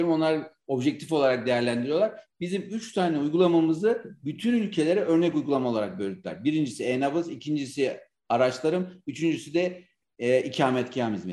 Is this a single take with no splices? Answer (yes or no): yes